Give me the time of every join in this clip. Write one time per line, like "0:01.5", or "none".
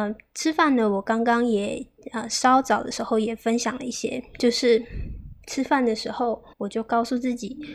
0:06.5